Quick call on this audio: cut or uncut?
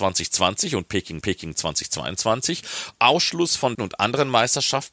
cut